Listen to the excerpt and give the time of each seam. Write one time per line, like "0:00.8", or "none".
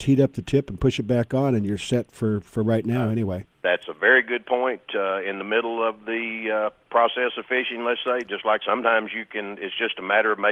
0:08.6